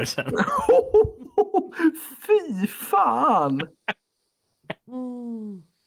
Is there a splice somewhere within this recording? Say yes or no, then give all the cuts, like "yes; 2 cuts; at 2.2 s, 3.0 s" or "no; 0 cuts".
no; 0 cuts